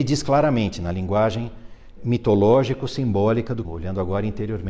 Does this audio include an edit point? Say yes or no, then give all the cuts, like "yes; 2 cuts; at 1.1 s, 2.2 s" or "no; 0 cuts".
yes; 2 cuts; at 2.0 s, 3.6 s